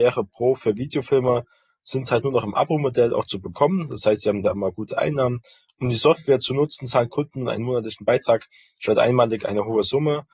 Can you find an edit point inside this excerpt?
no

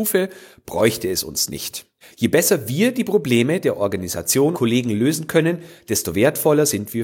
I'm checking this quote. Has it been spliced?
yes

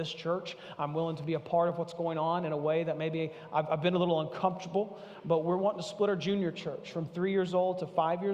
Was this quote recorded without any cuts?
yes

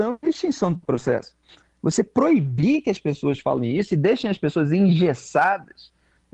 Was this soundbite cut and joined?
no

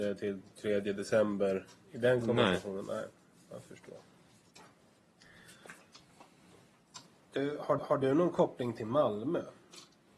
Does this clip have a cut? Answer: yes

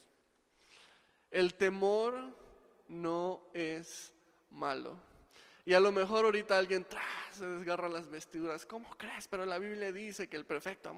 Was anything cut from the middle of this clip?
no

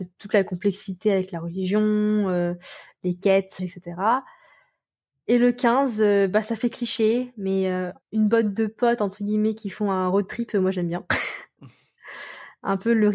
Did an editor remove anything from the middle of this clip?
yes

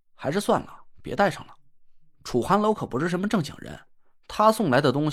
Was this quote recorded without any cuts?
yes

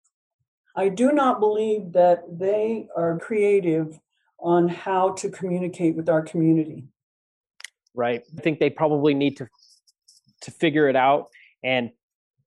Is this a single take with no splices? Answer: no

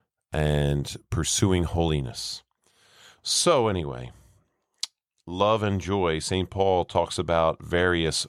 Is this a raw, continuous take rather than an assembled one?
yes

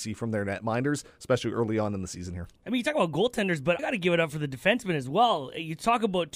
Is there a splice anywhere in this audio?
yes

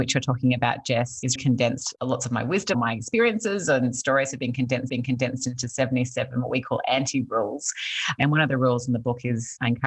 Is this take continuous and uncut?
no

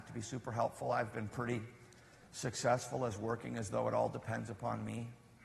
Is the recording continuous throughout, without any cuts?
yes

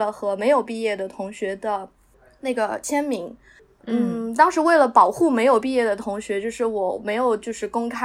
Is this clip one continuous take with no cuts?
yes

